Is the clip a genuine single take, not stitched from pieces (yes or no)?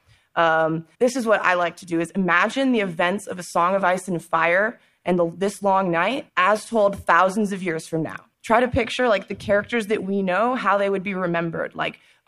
no